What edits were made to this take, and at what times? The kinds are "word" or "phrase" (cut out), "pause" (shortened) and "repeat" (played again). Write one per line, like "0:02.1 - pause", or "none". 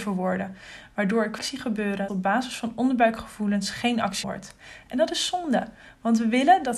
0:01.4 - word
0:02.1 - word
0:04.2 - word